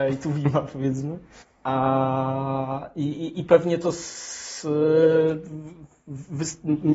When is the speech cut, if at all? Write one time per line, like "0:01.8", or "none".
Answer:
0:01.4